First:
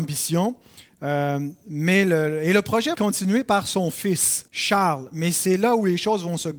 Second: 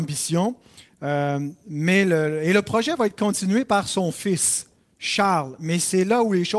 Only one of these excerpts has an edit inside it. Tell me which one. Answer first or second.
first